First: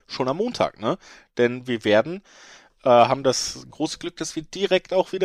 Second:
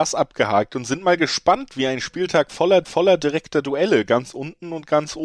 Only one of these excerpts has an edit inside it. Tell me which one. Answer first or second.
second